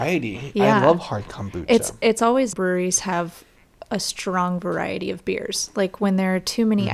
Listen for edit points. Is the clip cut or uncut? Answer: cut